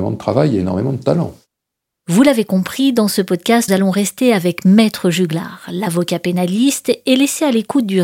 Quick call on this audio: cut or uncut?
cut